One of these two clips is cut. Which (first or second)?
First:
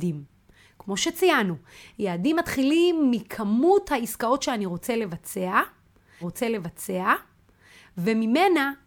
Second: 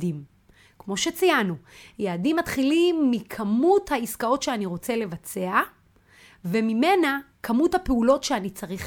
first